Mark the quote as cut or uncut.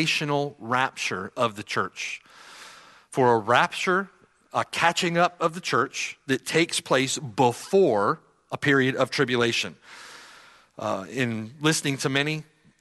uncut